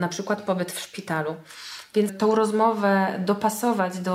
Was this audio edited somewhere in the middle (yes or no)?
yes